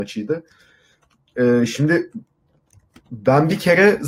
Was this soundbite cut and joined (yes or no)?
no